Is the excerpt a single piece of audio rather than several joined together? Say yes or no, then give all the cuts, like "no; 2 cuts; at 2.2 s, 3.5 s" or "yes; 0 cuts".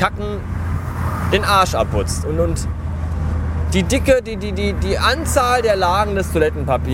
yes; 0 cuts